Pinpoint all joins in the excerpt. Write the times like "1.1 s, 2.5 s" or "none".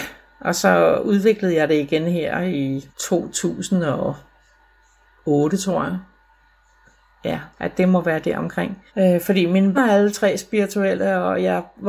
2.9 s, 7.5 s, 8.9 s, 9.7 s